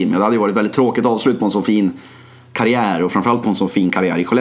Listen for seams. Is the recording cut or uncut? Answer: uncut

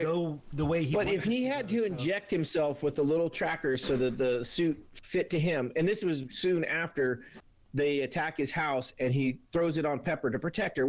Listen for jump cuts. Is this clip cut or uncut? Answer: cut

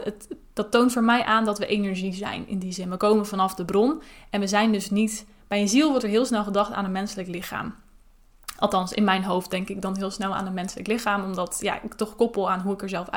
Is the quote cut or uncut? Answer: uncut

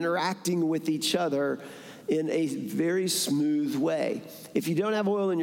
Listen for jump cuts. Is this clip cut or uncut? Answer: uncut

